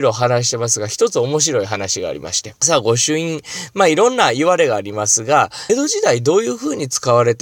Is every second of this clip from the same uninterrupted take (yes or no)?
no